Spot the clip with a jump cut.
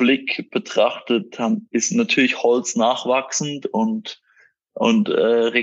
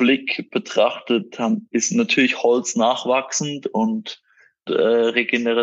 second; 1 cut; at 4.7 s

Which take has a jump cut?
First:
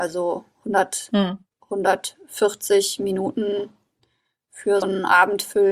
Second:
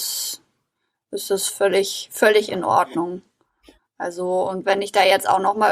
first; 1 cut; at 4.8 s

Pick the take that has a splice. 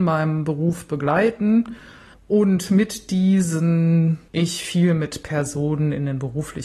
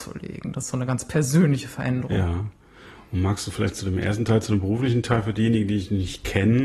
first; 2 cuts; at 2.1 s, 4.3 s

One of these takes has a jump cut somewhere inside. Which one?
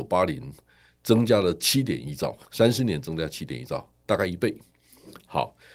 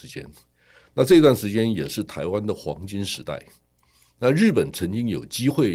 first; 1 cut; at 2.4 s

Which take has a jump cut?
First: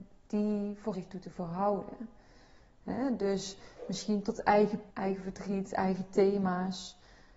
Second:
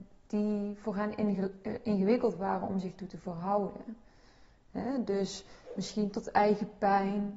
first; 2 cuts; at 0.9 s, 4.9 s

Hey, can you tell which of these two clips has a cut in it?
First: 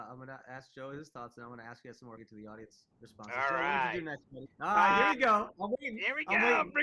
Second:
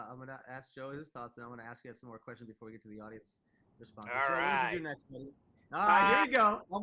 first; 3 cuts; at 2.2 s, 2.9 s, 4.5 s

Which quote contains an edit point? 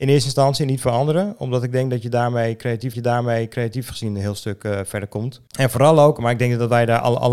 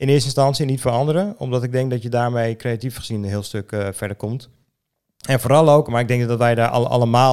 first; 2 cuts; at 2.9 s, 5.5 s

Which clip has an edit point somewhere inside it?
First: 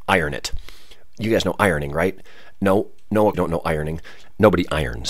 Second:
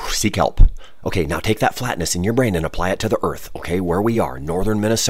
first; 1 cut; at 3.3 s

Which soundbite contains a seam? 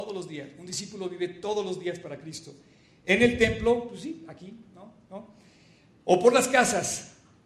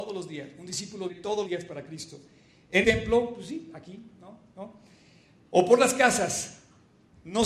second; 3 cuts; at 1.1 s, 1.5 s, 2.8 s

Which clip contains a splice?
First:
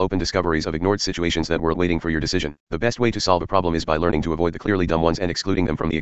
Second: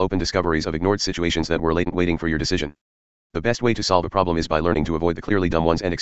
first; 2 cuts; at 1.7 s, 2.6 s

